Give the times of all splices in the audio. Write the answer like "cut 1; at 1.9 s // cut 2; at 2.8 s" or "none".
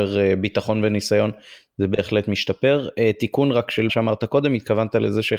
cut 1; at 3.9 s